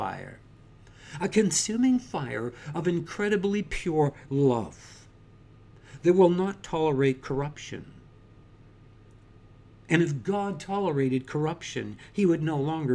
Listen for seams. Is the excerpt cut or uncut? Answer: uncut